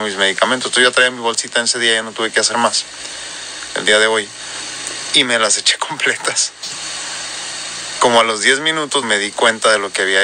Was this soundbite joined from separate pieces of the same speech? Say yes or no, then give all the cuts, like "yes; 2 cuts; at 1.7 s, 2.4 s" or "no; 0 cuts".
yes; 1 cut; at 9.0 s